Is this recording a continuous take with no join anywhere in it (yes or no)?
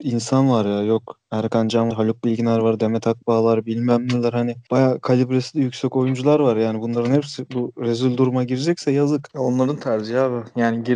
no